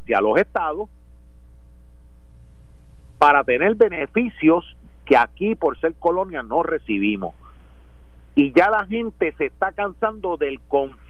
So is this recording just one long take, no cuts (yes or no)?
yes